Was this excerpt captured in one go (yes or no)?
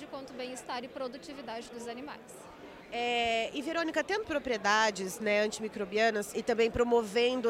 no